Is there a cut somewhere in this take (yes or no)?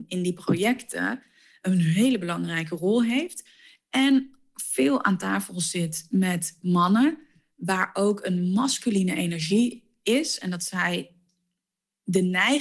no